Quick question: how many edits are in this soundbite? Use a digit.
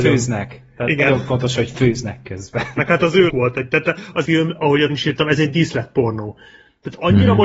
3